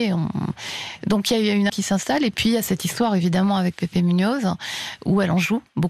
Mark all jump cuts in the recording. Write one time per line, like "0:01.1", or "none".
0:01.7